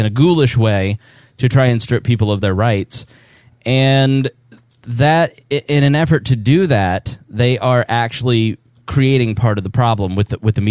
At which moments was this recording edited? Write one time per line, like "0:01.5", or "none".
none